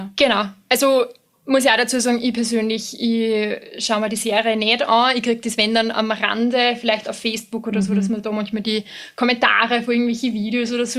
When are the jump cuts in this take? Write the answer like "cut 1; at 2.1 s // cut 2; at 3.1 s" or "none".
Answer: none